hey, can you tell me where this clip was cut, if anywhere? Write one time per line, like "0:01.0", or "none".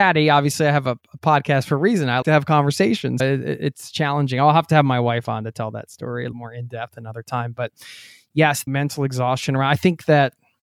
0:02.2
0:03.2
0:06.3
0:08.7